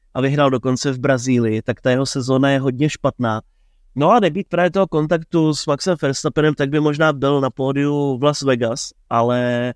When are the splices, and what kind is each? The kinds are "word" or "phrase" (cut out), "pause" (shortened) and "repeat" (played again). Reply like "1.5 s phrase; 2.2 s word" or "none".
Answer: none